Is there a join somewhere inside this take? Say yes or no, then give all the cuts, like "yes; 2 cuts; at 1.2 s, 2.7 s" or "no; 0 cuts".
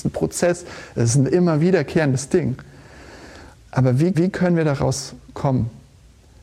yes; 2 cuts; at 3.5 s, 4.1 s